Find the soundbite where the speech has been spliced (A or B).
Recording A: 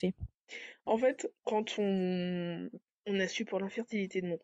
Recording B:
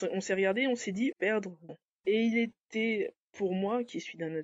B